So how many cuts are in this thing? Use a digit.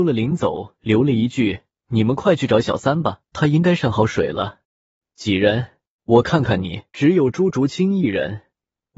4